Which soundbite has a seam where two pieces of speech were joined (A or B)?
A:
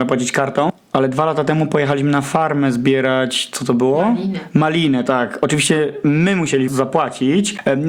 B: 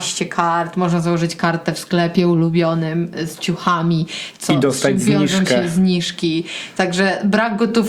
A